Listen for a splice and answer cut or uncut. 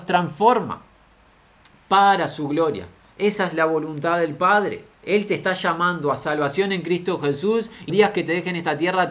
cut